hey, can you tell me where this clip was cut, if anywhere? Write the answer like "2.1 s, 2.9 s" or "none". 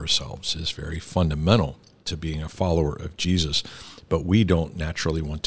none